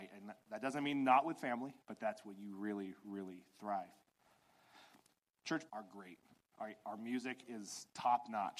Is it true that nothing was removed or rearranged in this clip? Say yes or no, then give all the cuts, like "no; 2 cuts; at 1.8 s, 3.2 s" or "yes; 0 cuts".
no; 2 cuts; at 1.8 s, 5.7 s